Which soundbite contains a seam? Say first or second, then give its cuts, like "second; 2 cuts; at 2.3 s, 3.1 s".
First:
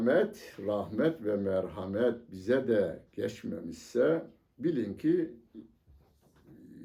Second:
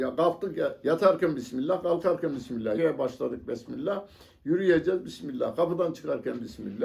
second; 1 cut; at 2.7 s